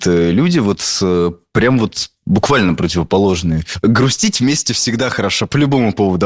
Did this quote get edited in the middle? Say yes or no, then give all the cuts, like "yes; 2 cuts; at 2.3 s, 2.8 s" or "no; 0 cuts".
no; 0 cuts